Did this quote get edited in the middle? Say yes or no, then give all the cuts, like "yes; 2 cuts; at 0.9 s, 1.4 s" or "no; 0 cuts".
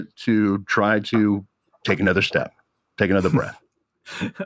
no; 0 cuts